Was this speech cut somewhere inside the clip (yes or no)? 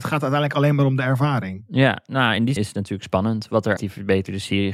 yes